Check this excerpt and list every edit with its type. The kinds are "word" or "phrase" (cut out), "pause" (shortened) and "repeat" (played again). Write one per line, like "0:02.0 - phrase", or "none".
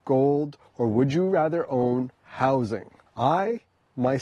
0:02.1 - pause